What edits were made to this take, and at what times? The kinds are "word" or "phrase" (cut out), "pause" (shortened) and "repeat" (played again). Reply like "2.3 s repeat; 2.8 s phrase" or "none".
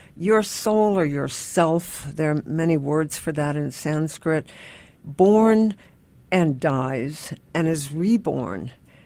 4.9 s phrase